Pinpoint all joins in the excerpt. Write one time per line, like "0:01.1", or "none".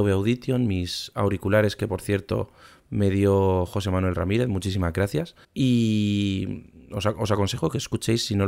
0:05.4

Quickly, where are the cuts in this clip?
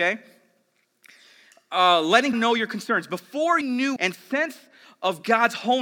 0:02.3
0:03.6
0:04.0

